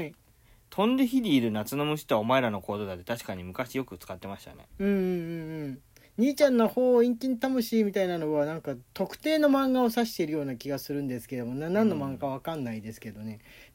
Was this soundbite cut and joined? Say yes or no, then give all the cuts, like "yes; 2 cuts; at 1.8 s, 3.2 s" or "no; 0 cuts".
no; 0 cuts